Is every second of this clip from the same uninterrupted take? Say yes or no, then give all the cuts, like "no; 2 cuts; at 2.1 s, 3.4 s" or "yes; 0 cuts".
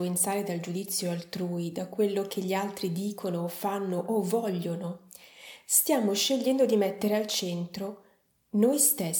yes; 0 cuts